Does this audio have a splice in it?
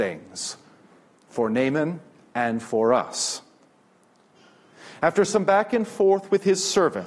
no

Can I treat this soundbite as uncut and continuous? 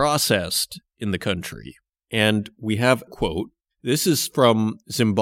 no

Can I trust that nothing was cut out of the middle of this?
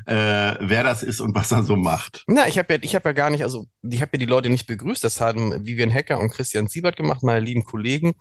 yes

